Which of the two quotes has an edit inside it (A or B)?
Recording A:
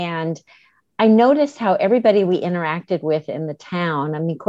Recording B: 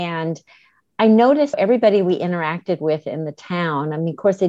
B